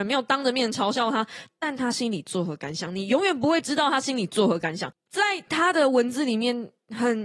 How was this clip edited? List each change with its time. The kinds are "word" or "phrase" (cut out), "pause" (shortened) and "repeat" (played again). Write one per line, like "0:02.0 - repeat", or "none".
none